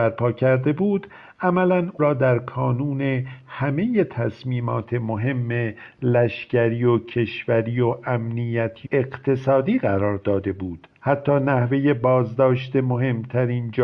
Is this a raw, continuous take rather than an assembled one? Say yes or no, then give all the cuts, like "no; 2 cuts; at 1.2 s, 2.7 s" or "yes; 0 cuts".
no; 3 cuts; at 2.0 s, 8.8 s, 10.9 s